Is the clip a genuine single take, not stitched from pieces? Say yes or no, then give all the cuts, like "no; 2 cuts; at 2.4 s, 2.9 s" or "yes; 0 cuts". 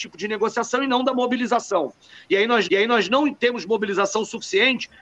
no; 1 cut; at 2.7 s